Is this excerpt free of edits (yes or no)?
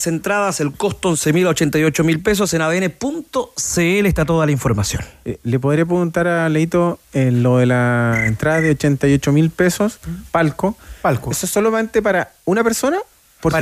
no